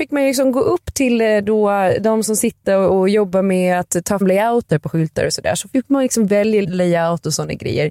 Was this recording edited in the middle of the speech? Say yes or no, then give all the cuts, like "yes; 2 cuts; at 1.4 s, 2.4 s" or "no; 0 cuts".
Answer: yes; 2 cuts; at 4.2 s, 6.6 s